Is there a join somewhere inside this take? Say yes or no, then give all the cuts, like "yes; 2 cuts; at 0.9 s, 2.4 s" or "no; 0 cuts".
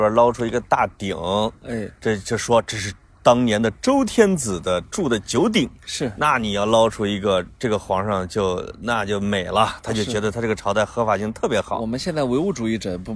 no; 0 cuts